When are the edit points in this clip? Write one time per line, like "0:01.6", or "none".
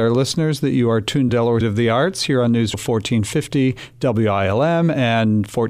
0:01.3
0:01.6
0:02.7